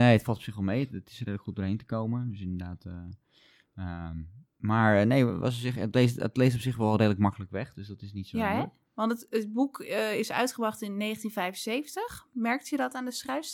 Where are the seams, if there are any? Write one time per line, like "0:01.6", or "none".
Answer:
0:04.5